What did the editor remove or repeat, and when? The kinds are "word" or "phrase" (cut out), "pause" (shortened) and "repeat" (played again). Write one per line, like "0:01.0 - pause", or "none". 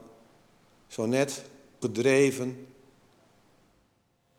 0:01.8 - word